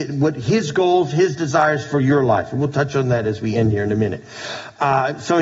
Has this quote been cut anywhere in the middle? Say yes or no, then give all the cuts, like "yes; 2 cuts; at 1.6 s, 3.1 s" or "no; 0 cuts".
no; 0 cuts